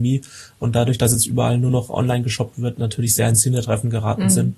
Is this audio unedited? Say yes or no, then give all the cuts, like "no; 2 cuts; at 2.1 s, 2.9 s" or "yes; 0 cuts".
yes; 0 cuts